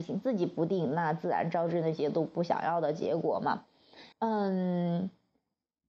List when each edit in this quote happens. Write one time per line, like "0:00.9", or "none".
0:04.1